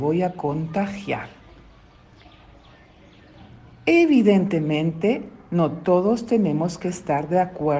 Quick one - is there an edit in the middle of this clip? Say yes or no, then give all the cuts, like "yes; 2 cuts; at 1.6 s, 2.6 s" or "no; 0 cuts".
no; 0 cuts